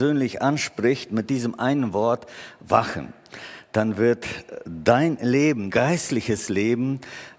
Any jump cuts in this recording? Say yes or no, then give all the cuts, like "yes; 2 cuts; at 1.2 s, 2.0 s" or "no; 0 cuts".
yes; 1 cut; at 5.7 s